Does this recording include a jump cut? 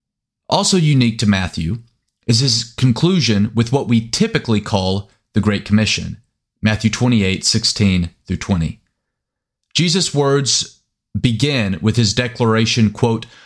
no; 0 cuts

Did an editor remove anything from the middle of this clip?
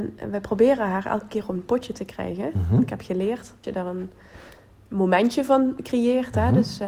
yes; 1 cut; at 3.6 s

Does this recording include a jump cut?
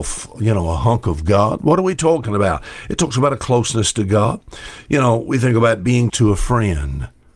yes; 1 cut; at 6.1 s

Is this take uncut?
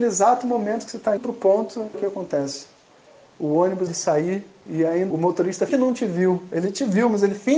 no; 5 cuts; at 1.2 s, 1.9 s, 3.9 s, 5.1 s, 5.7 s

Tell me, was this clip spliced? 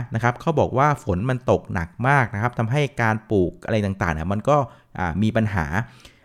no; 0 cuts

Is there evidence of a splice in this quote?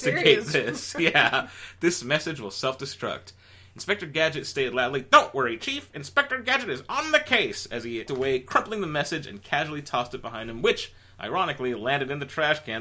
yes; 1 cut; at 8.1 s

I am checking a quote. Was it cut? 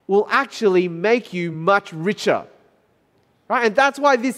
no; 0 cuts

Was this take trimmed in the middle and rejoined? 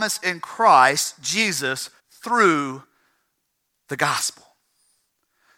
yes; 1 cut; at 2.0 s

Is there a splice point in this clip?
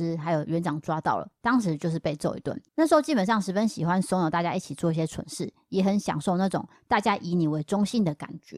yes; 1 cut; at 2.7 s

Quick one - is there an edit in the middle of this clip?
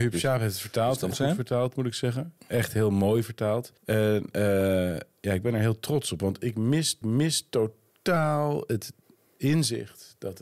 yes; 4 cuts; at 1.1 s, 2.4 s, 3.8 s, 7.0 s

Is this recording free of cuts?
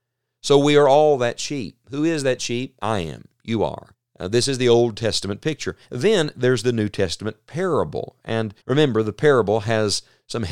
no; 3 cuts; at 3.9 s, 5.8 s, 8.6 s

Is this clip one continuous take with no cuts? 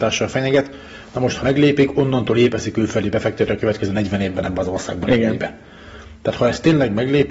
no; 1 cut; at 1.4 s

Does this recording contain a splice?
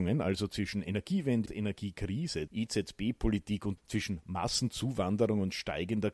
yes; 3 cuts; at 1.5 s, 2.5 s, 3.8 s

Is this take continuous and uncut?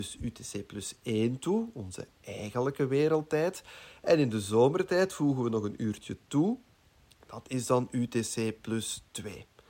yes; 0 cuts

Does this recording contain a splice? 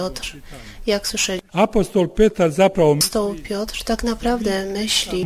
yes; 1 cut; at 1.5 s

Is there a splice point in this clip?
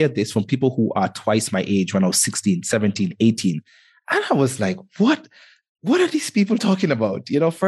no; 0 cuts

